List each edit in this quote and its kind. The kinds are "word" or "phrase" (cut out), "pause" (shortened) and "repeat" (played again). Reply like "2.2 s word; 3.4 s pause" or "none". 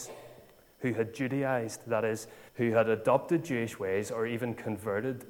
2.5 s pause

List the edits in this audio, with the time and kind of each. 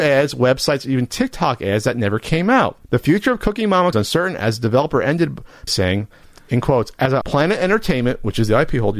2.8 s pause; 3.9 s phrase; 5.7 s word; 7.2 s word

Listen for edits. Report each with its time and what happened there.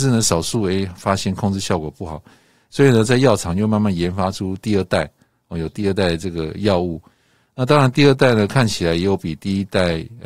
none

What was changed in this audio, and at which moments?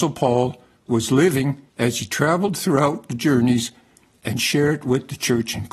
1.7 s pause

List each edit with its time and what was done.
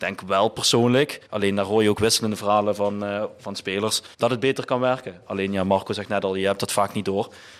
1.3 s pause; 4.1 s pause

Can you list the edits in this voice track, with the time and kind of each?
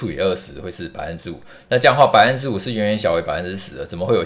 none

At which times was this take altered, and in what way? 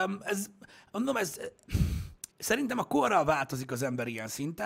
2.3 s pause

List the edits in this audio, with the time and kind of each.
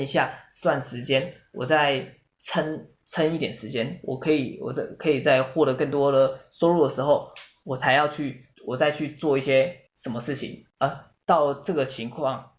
8.5 s pause; 9.9 s pause; 10.7 s pause

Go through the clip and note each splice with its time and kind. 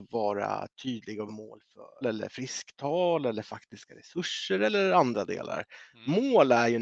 1.3 s word; 2.0 s word

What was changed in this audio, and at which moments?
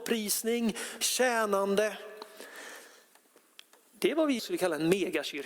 1.0 s word; 4.4 s word

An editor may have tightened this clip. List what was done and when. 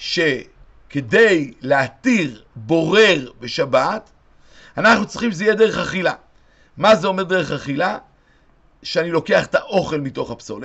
none

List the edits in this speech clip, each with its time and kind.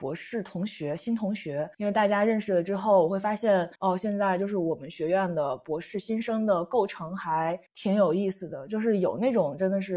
1.7 s pause; 3.8 s pause; 7.7 s pause

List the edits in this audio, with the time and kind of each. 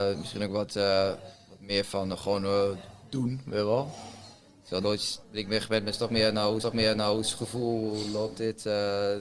4.8 s word; 5.2 s pause; 6.6 s repeat

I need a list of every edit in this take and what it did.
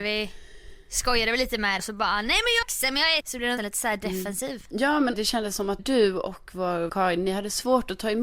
1.8 s word; 2.6 s word; 3.2 s word; 3.6 s word; 5.1 s word; 5.8 s word; 6.9 s word

